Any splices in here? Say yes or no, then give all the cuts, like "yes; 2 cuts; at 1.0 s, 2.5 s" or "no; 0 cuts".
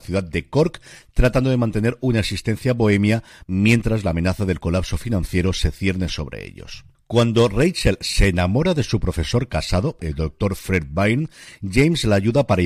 no; 0 cuts